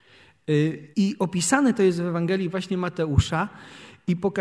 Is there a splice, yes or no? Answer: yes